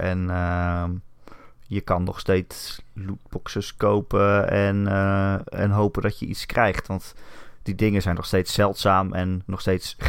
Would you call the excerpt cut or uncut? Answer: uncut